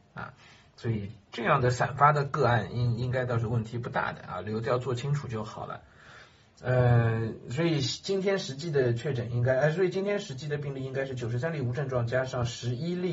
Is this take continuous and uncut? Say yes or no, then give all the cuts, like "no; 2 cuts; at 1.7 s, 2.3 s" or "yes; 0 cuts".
yes; 0 cuts